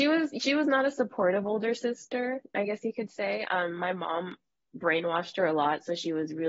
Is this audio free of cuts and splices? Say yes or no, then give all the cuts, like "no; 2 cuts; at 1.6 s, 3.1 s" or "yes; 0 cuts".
yes; 0 cuts